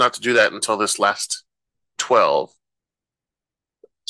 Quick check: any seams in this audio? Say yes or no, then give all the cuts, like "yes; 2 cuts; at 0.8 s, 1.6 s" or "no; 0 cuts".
yes; 1 cut; at 2.0 s